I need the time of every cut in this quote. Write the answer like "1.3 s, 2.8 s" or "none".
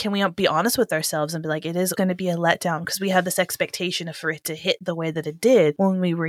1.9 s